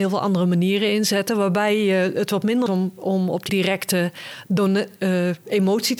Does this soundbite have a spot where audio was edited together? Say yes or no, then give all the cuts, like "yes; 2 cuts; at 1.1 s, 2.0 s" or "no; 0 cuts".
yes; 2 cuts; at 2.7 s, 3.5 s